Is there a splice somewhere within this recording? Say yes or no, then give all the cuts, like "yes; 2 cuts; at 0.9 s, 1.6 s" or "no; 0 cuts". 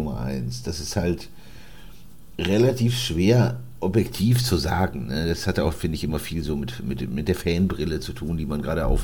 no; 0 cuts